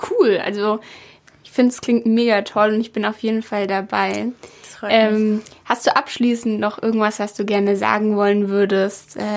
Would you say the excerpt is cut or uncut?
uncut